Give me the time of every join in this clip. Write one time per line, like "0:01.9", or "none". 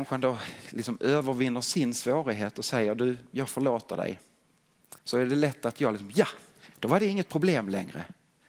0:05.0